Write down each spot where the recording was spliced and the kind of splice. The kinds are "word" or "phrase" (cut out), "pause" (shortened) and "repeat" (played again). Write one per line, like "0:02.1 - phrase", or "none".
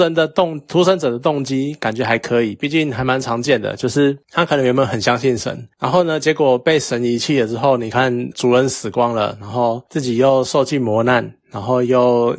0:08.3 - word